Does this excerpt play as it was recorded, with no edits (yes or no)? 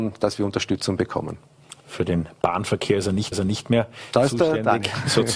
no